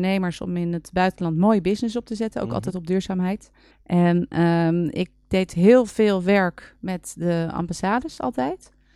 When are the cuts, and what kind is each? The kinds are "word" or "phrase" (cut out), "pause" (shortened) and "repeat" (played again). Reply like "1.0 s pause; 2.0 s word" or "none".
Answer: 3.7 s pause